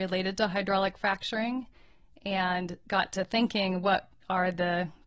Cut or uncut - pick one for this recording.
uncut